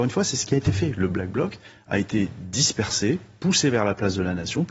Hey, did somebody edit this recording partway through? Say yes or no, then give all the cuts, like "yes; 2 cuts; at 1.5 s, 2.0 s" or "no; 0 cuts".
no; 0 cuts